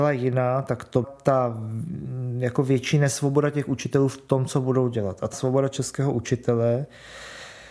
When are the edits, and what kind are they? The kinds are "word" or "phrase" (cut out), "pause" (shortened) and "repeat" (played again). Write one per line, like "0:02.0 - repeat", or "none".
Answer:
0:01.0 - word
0:05.3 - word